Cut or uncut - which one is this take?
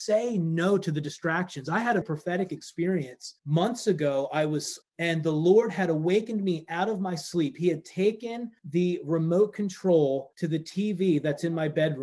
cut